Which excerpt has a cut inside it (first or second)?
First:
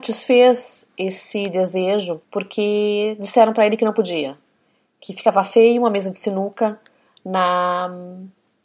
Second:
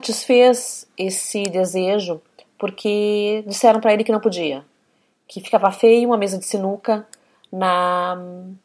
first